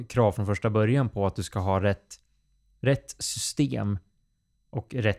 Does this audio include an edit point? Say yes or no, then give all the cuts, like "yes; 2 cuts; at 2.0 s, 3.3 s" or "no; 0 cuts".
no; 0 cuts